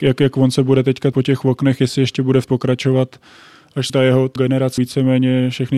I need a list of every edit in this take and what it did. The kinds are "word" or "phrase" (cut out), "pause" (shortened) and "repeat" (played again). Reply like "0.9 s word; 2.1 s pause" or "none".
1.1 s word; 2.5 s phrase; 3.9 s word; 4.4 s word; 4.8 s phrase